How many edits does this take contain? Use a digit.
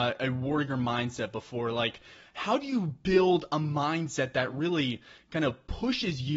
0